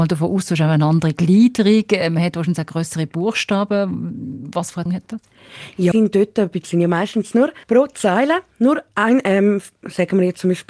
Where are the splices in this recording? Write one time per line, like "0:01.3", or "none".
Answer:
0:04.9
0:05.9
0:06.6
0:07.6